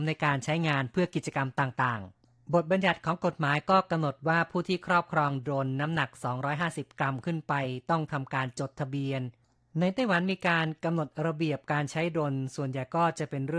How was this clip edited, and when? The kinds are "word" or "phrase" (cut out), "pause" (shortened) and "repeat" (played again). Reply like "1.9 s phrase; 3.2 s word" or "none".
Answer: none